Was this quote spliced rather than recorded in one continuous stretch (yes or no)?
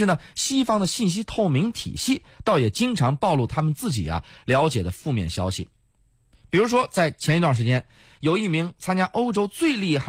no